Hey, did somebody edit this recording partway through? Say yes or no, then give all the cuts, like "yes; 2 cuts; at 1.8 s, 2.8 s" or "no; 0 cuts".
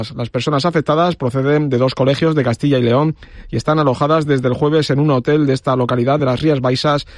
no; 0 cuts